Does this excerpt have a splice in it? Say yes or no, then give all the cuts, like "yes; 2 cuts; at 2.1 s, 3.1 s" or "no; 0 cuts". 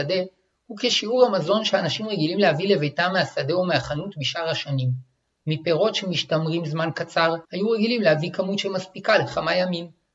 yes; 1 cut; at 7.4 s